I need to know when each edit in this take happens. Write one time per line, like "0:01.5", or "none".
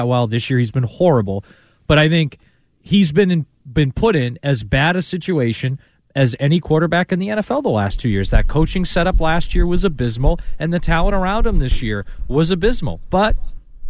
none